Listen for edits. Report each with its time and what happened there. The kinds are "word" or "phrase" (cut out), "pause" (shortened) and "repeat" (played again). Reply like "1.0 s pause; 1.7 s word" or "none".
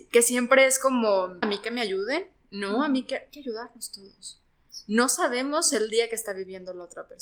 1.4 s word; 3.3 s word